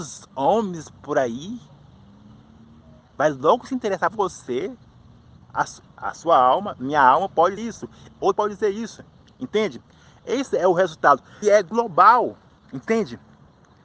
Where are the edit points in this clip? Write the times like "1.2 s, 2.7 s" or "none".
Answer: 4.1 s, 7.6 s, 8.3 s, 11.4 s